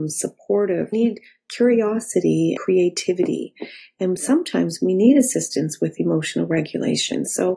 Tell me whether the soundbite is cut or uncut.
cut